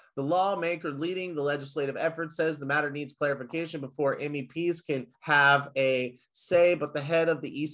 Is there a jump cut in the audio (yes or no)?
yes